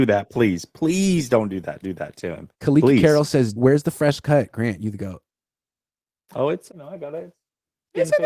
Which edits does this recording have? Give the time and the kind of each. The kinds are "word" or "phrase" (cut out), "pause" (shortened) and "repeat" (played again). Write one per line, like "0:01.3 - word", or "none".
0:01.8 - repeat
0:02.5 - pause
0:03.6 - word
0:06.7 - word